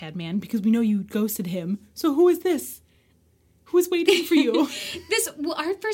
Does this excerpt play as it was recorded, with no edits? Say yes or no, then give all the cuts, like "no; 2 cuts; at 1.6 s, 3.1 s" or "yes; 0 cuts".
yes; 0 cuts